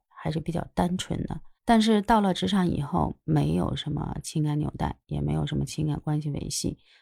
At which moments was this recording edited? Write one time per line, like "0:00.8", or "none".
0:01.5